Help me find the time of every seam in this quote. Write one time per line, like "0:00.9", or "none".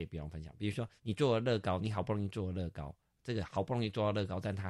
0:01.0